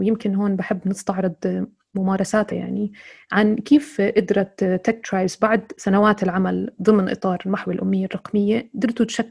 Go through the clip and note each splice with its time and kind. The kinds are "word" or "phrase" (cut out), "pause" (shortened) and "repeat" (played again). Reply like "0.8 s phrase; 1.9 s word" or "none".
2.5 s word